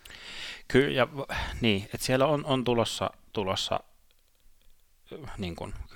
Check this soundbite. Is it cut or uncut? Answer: uncut